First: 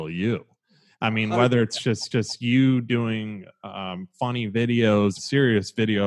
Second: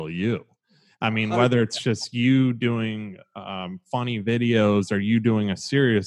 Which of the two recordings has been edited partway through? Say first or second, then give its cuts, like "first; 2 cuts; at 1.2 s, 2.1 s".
first; 2 cuts; at 2.1 s, 5.2 s